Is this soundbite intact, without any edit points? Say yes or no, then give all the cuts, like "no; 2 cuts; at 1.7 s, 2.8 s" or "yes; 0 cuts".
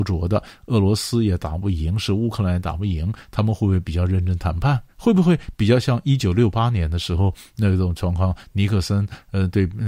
no; 1 cut; at 4.9 s